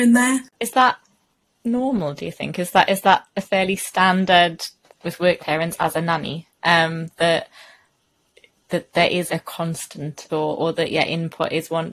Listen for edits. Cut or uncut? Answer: cut